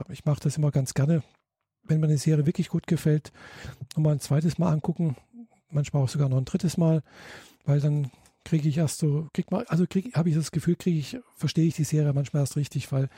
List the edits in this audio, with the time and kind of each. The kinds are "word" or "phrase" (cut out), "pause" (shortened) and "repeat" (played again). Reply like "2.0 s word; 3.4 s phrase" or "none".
none